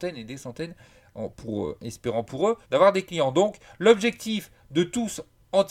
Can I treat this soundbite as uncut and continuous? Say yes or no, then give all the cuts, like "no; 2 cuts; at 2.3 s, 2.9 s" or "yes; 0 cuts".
no; 1 cut; at 2.6 s